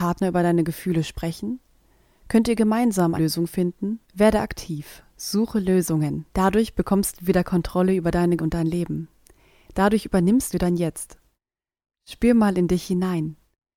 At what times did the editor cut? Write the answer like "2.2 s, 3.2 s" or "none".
3.1 s, 4.0 s, 5.1 s, 6.3 s, 8.4 s, 10.5 s